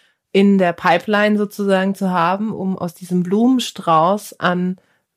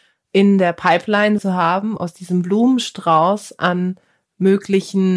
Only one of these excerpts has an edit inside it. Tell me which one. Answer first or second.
second